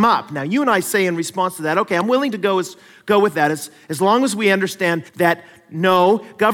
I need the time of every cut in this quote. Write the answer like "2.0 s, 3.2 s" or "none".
5.1 s